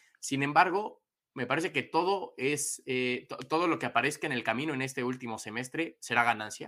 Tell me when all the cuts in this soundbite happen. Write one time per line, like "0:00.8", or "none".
none

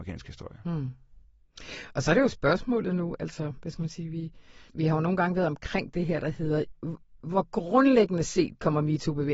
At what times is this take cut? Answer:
0:04.7

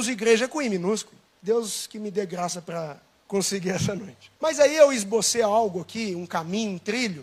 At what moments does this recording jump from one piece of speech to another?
0:01.3
0:03.2
0:04.4

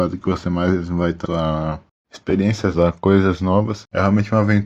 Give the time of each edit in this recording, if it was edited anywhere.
0:01.2
0:02.7

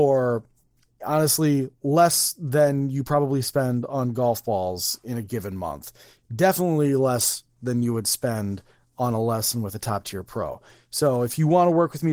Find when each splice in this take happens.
none

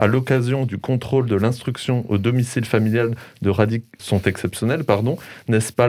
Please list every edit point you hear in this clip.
0:04.0

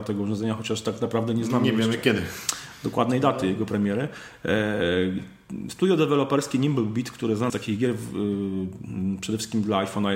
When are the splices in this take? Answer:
0:07.5

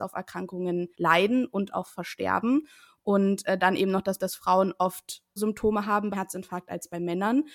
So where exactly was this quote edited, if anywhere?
0:00.9
0:04.2
0:05.4
0:06.1

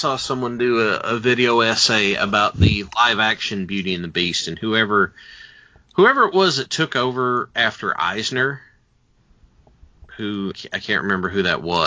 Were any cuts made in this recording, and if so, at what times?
0:10.5

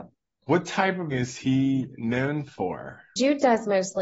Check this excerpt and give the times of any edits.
0:01.1

